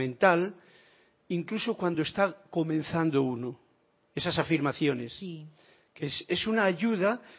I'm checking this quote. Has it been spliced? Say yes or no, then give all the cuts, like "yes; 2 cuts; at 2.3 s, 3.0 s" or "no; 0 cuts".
no; 0 cuts